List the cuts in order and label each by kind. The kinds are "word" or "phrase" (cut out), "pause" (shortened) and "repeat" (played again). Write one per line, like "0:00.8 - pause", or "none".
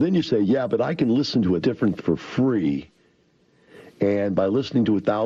0:01.6 - word
0:02.0 - word